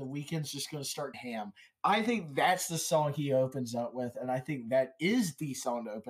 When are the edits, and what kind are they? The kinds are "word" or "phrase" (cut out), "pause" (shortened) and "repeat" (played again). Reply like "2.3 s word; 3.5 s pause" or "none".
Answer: 1.1 s word